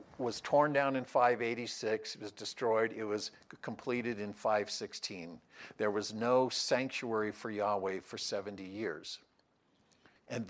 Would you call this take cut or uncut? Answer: uncut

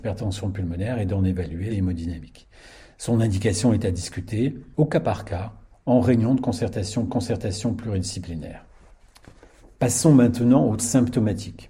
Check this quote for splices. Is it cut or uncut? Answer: cut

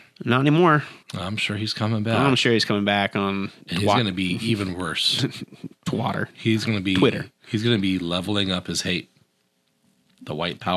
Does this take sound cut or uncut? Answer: cut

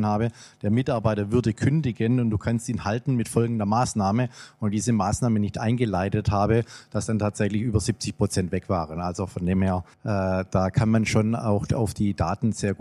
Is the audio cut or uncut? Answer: cut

